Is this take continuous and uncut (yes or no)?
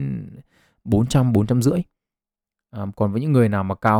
yes